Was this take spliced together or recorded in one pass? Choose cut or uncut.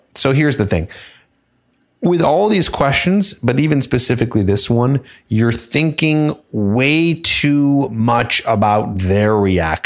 uncut